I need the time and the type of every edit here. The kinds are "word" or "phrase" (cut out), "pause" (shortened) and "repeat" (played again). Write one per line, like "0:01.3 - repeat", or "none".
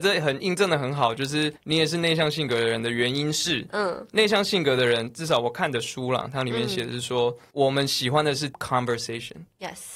0:01.6 - pause
0:07.5 - pause
0:08.5 - word